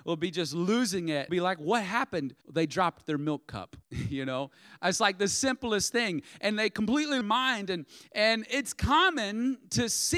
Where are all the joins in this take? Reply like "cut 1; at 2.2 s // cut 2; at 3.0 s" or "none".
cut 1; at 1.3 s // cut 2; at 2.4 s // cut 3; at 3.8 s // cut 4; at 7.2 s